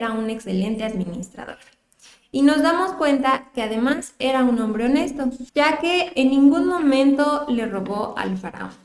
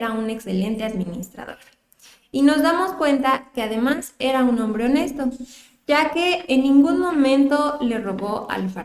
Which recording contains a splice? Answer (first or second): first